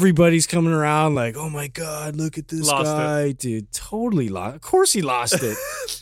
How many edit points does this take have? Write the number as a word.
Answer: zero